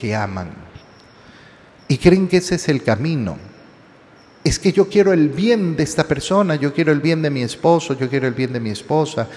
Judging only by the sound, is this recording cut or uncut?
uncut